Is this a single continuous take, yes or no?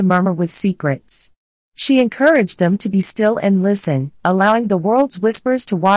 yes